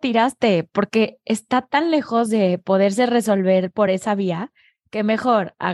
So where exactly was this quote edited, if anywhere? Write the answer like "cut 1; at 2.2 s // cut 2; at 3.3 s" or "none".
none